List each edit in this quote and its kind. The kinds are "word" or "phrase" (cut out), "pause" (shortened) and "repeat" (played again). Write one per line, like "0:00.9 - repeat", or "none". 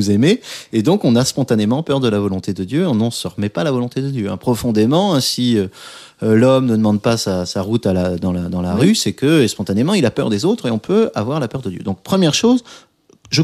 none

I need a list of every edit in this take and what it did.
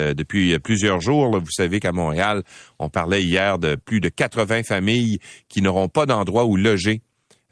none

